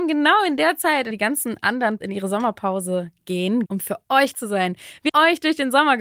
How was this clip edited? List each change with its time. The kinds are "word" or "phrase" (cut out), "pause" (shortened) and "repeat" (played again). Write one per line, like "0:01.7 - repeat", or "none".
0:01.1 - word
0:02.0 - word
0:03.7 - word
0:04.3 - word
0:05.1 - word